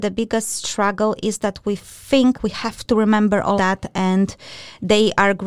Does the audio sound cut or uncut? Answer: cut